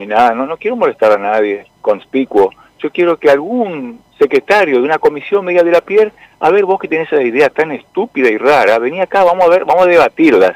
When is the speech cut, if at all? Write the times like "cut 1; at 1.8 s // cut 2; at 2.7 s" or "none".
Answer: cut 1; at 1.7 s